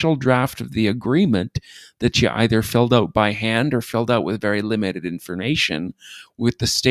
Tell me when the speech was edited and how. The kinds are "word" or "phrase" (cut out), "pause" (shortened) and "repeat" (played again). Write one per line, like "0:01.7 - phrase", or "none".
none